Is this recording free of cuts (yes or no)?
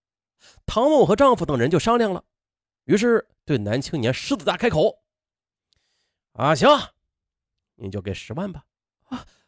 yes